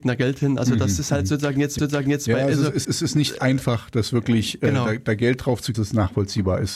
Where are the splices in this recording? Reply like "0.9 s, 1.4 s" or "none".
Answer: 1.8 s, 2.8 s, 5.7 s